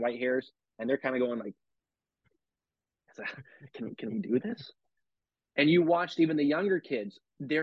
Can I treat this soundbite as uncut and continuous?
yes; 0 cuts

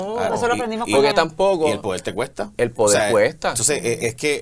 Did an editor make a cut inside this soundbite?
yes; 1 cut; at 1.1 s

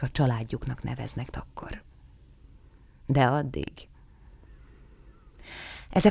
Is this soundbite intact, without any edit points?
no; 1 cut; at 1.3 s

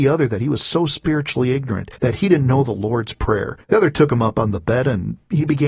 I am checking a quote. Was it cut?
yes; 2 cuts; at 2.0 s, 3.6 s

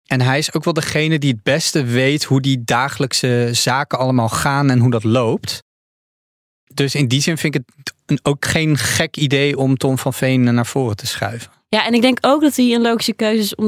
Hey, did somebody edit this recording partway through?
no; 0 cuts

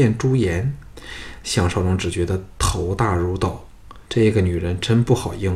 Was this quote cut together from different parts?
yes; 1 cut; at 4.0 s

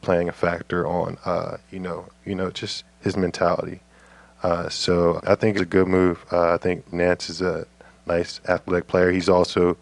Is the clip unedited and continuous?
no; 5 cuts; at 2.1 s, 2.8 s, 5.2 s, 5.6 s, 6.9 s

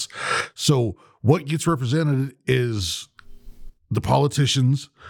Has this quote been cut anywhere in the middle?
no; 0 cuts

